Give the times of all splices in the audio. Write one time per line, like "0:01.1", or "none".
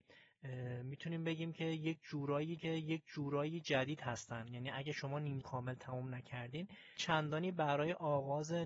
0:02.6
0:05.4
0:07.0